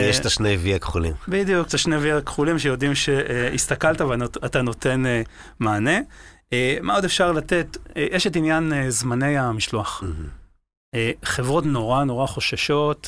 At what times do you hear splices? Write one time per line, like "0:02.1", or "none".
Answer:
0:01.7